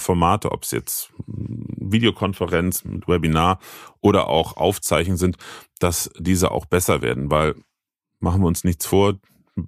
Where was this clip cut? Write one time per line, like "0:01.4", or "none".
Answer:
none